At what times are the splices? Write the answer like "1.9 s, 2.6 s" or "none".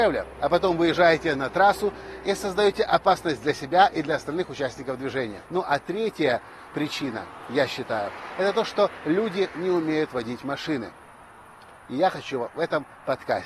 5.5 s